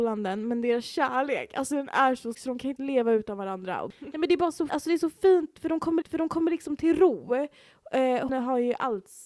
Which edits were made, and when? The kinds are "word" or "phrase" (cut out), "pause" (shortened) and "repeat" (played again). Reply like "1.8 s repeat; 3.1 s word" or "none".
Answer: 2.3 s word; 2.8 s word; 4.7 s word; 6.0 s repeat; 8.3 s word